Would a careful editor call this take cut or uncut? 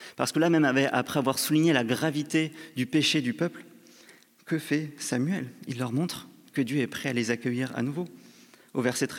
uncut